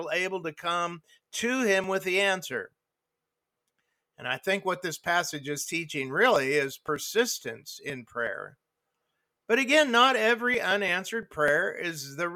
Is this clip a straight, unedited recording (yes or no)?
yes